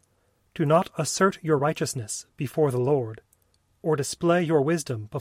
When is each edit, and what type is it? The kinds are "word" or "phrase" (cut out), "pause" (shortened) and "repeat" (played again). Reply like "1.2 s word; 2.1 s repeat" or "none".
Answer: none